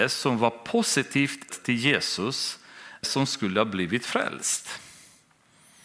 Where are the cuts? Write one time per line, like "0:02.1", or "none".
0:01.5
0:03.0